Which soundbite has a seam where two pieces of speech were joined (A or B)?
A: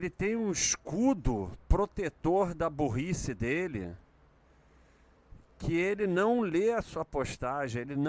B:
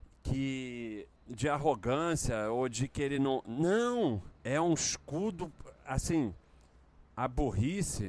B